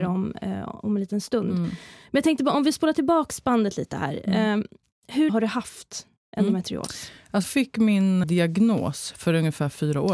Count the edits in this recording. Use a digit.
3